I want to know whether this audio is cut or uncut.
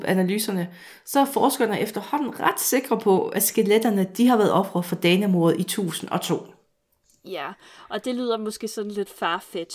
uncut